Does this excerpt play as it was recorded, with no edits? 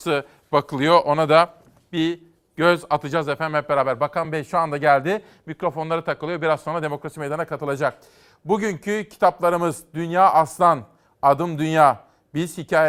yes; 0 cuts

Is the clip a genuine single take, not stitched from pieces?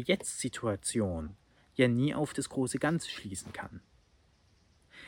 yes; 0 cuts

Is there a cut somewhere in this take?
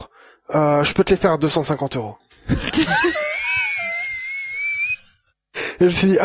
yes; 1 cut; at 2.2 s

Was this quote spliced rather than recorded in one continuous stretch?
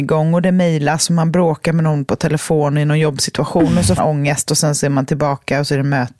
yes; 1 cut; at 4.0 s

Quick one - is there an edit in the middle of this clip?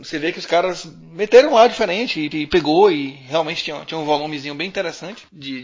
yes; 1 cut; at 2.3 s

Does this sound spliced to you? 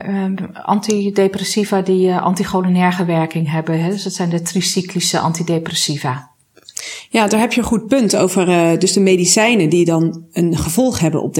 no; 0 cuts

